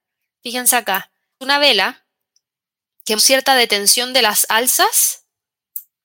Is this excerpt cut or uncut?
cut